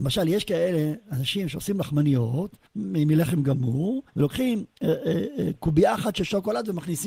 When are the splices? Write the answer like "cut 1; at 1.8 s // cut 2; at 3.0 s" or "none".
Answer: cut 1; at 2.7 s // cut 2; at 4.1 s